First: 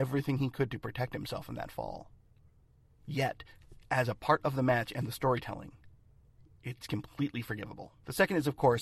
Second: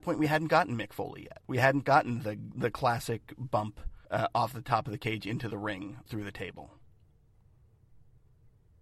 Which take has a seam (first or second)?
second